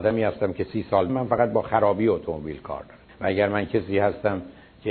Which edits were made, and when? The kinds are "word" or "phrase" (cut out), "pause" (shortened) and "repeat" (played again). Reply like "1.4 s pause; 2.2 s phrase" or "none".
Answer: 1.1 s word; 3.1 s pause